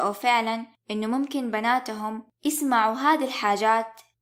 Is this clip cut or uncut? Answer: uncut